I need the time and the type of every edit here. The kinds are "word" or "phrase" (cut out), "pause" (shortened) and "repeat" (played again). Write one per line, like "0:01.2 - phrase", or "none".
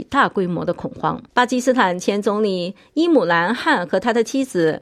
0:01.3 - pause